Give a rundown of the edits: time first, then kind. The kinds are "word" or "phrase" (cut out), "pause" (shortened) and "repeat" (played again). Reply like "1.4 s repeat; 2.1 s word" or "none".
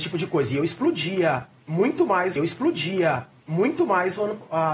2.4 s repeat